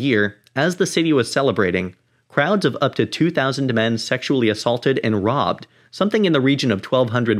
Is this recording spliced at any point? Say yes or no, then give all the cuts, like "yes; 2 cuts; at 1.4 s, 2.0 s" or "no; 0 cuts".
no; 0 cuts